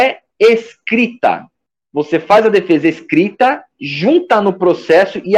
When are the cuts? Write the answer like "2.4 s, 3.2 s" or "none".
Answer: 1.7 s